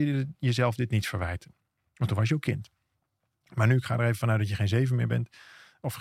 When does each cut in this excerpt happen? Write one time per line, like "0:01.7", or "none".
none